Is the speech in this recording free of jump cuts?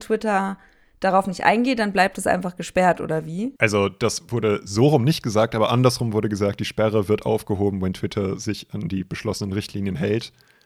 no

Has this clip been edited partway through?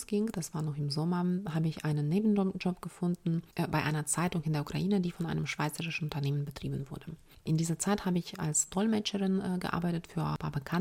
no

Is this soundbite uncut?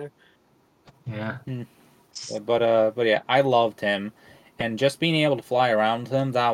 yes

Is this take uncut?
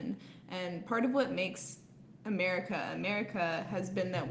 yes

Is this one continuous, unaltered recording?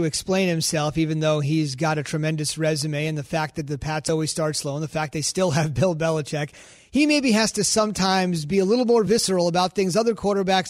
yes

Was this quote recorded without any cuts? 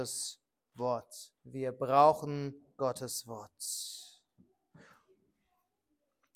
no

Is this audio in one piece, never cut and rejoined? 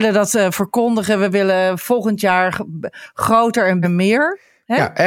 no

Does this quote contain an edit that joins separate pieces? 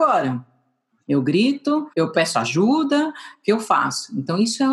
yes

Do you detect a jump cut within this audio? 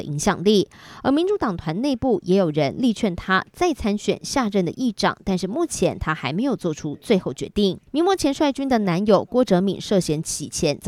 yes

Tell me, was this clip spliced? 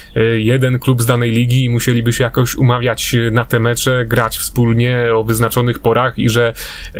no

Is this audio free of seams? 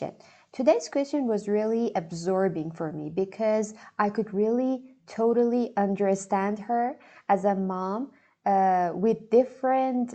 yes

